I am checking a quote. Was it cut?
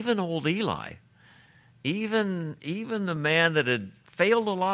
no; 0 cuts

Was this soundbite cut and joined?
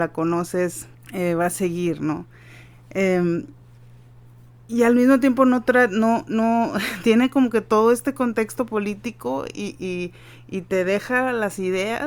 yes; 1 cut; at 0.9 s

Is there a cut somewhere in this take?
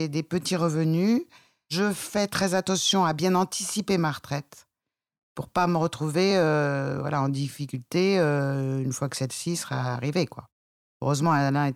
no; 0 cuts

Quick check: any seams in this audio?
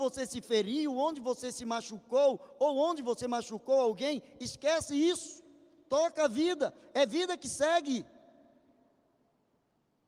no; 0 cuts

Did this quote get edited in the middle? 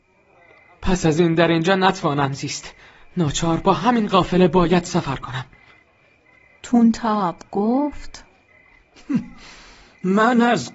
no; 0 cuts

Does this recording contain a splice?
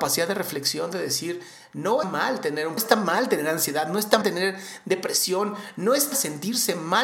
yes; 4 cuts; at 2.0 s, 2.8 s, 4.2 s, 6.1 s

